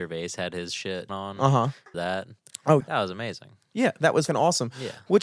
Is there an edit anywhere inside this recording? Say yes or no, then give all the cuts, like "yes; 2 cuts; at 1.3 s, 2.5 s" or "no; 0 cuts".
yes; 4 cuts; at 1.1 s, 1.9 s, 2.8 s, 4.3 s